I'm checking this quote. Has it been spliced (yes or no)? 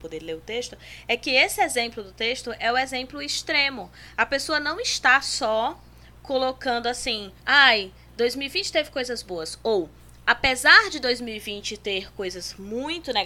yes